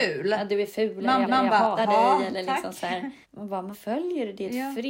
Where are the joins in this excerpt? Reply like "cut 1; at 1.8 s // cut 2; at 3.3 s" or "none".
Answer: cut 1; at 1.2 s // cut 2; at 1.8 s // cut 3; at 3.2 s // cut 4; at 3.7 s